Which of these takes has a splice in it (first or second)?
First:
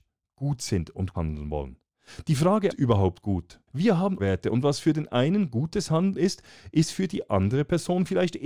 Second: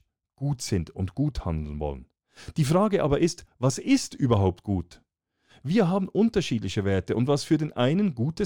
first